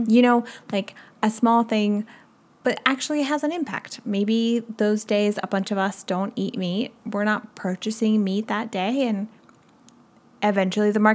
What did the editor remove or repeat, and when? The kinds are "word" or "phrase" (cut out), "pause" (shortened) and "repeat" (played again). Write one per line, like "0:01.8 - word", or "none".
none